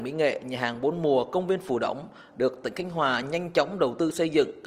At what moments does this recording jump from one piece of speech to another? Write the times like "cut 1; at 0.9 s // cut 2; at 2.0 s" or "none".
none